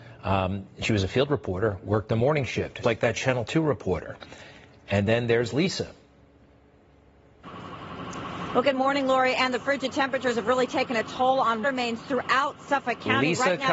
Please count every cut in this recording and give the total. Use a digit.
2